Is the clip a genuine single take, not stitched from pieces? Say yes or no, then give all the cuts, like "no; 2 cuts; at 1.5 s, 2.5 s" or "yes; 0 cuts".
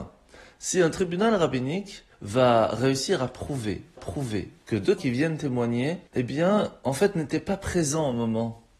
no; 4 cuts; at 2.1 s, 4.0 s, 5.0 s, 6.1 s